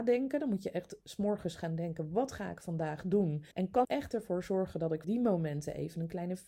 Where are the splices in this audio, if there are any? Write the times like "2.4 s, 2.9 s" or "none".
3.5 s, 3.8 s, 5.0 s